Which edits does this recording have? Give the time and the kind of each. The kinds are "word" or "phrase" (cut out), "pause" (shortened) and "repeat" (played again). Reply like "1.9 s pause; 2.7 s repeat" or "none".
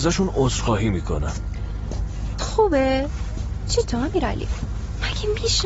2.4 s word; 3.8 s phrase